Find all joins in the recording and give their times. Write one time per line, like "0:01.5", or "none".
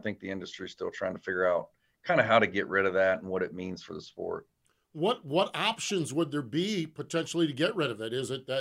none